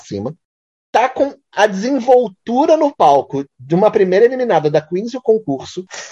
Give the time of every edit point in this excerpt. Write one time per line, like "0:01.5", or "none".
none